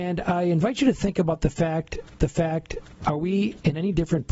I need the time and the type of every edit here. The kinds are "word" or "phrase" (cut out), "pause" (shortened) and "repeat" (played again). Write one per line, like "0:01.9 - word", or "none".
0:02.2 - repeat